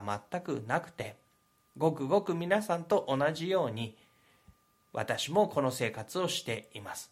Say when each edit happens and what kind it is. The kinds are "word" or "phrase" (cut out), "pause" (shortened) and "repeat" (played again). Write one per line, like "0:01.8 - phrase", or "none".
none